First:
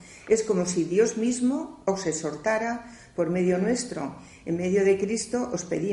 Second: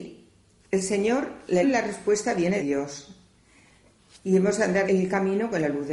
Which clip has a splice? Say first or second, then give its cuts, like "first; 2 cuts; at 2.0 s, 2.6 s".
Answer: second; 3 cuts; at 1.6 s, 2.6 s, 4.9 s